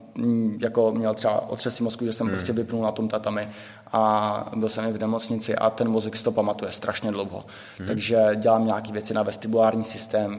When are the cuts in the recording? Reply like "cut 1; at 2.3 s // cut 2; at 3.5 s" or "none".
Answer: none